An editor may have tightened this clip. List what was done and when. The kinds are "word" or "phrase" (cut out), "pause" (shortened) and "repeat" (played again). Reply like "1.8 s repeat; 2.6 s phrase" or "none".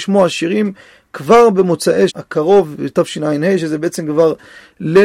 2.1 s word